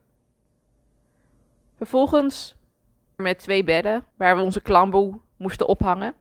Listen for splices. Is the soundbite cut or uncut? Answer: cut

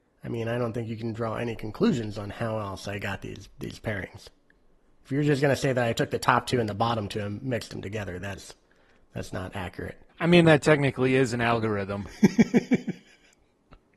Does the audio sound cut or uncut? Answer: uncut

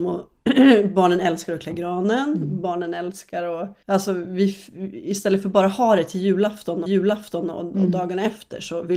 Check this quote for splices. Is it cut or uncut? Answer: cut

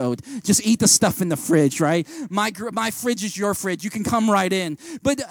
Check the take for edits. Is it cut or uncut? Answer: uncut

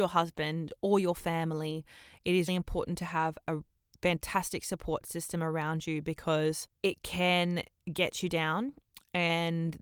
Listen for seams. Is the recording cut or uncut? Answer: cut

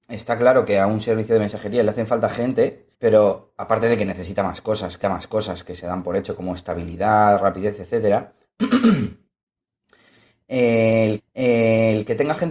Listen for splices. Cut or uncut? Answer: cut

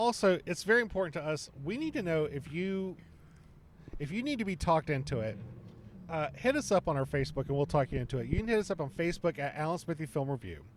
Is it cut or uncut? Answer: uncut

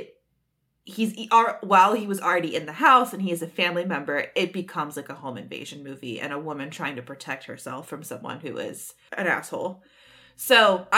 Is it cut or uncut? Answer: uncut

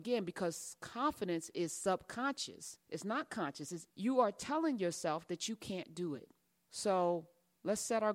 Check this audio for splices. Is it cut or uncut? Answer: uncut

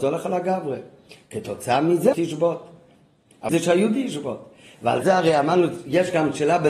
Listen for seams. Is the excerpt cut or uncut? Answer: cut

